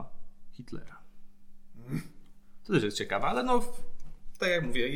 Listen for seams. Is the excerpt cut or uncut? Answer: uncut